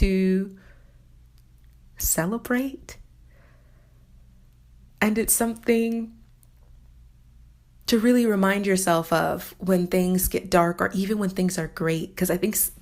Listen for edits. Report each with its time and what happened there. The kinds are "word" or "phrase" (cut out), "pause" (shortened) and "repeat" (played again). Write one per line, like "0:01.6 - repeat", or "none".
none